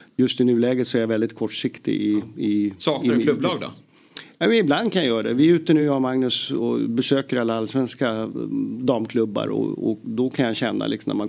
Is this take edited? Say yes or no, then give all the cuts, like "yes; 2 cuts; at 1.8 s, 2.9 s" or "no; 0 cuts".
no; 0 cuts